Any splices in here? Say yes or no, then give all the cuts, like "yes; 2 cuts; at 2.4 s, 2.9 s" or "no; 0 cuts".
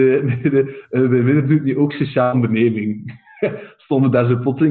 no; 0 cuts